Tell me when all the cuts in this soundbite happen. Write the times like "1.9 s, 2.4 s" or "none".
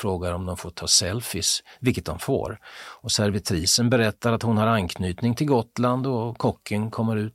none